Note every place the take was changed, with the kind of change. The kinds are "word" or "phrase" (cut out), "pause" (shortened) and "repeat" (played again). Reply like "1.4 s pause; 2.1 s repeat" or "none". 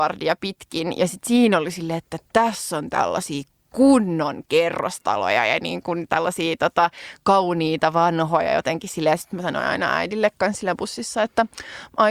none